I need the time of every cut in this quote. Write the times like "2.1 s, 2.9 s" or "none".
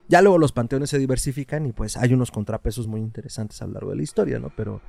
none